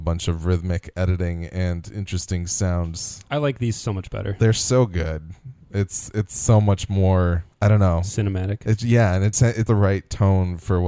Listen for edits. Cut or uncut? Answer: cut